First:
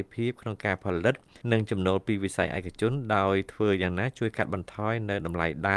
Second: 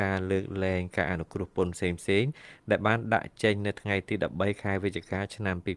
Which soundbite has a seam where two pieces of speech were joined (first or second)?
first